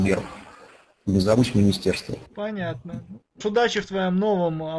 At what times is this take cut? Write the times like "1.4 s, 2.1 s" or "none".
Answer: 2.3 s, 3.4 s